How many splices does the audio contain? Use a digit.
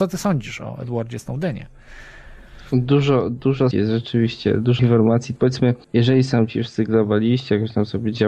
4